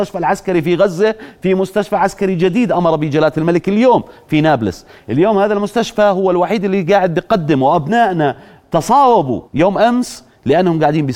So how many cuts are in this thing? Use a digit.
1